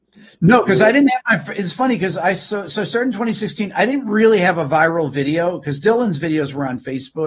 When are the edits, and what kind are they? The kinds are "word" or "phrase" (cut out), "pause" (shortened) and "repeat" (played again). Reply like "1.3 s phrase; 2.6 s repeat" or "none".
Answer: none